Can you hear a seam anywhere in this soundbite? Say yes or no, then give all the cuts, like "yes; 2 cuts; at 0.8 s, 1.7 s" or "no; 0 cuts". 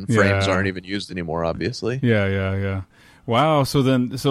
no; 0 cuts